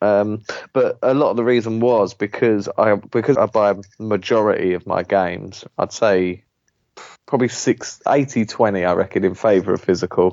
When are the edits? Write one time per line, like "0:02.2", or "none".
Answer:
0:03.3
0:07.2